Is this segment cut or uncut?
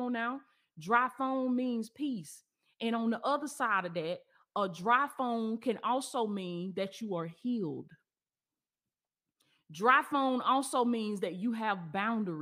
uncut